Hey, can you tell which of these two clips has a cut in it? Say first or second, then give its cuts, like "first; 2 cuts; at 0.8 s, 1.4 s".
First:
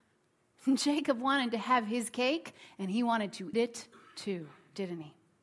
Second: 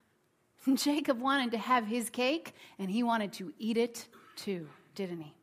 first; 1 cut; at 3.5 s